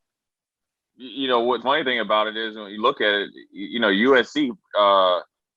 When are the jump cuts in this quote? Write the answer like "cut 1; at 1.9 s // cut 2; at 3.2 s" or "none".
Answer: cut 1; at 1.6 s // cut 2; at 2.8 s